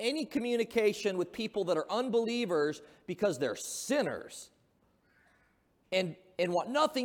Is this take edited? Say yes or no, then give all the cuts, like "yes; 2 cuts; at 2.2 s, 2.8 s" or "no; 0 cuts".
no; 0 cuts